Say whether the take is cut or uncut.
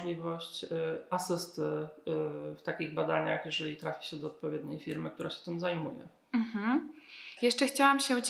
uncut